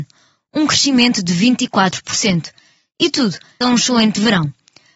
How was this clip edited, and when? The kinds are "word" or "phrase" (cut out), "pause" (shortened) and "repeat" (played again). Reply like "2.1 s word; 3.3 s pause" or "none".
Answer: 3.6 s word